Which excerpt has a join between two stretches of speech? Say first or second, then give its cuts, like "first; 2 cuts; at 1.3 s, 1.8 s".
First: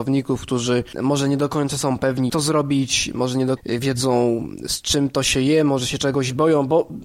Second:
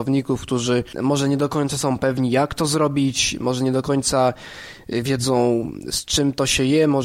first; 2 cuts; at 2.3 s, 3.6 s